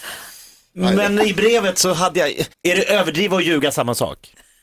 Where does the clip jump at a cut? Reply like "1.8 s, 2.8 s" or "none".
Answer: 2.5 s